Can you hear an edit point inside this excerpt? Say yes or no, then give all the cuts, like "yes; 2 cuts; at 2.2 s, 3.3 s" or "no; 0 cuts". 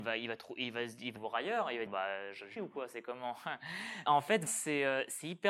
yes; 5 cuts; at 1.2 s, 1.9 s, 2.6 s, 4.1 s, 4.5 s